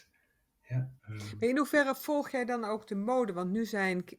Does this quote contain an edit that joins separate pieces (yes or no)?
yes